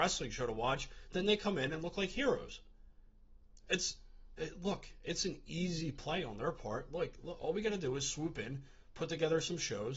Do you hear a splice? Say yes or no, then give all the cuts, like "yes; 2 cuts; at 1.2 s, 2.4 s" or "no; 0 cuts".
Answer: no; 0 cuts